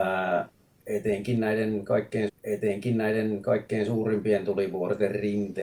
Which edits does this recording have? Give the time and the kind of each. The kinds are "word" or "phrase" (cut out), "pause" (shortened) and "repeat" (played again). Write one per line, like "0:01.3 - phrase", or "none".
0:02.3 - repeat